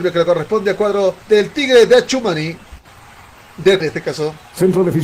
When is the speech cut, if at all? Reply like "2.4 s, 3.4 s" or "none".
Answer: 1.2 s, 3.8 s